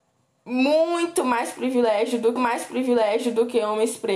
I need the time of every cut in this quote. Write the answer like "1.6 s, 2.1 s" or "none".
2.4 s